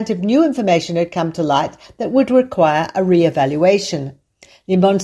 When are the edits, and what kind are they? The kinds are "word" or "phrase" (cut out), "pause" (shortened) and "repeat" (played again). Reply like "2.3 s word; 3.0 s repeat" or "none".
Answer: none